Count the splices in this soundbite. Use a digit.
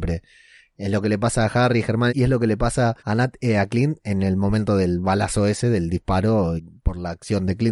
3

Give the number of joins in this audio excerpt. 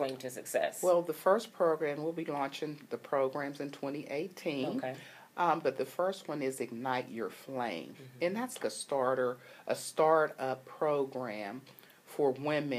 1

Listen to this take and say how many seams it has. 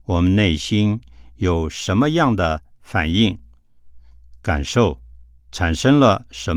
1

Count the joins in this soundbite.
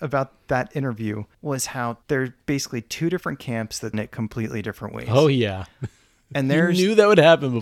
3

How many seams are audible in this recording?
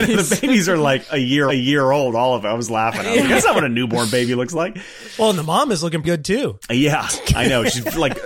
2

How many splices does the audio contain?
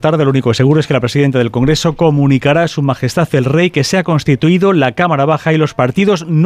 0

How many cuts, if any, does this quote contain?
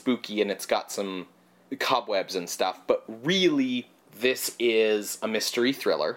0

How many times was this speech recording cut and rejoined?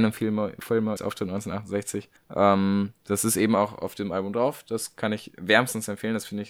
2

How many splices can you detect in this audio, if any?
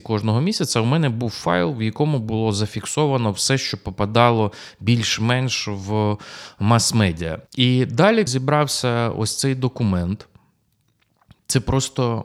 2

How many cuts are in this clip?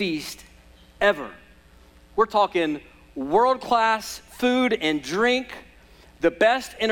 0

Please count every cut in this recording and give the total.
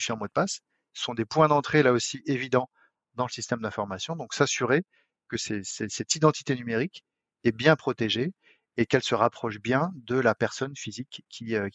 0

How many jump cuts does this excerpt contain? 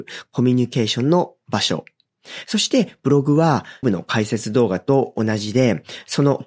1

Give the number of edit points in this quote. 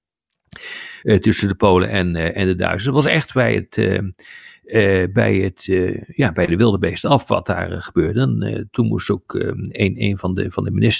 0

